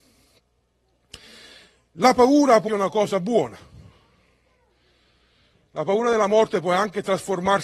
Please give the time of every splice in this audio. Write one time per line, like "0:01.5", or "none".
0:02.7